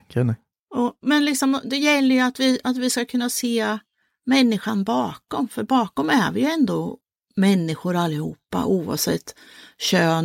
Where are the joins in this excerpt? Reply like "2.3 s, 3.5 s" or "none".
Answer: none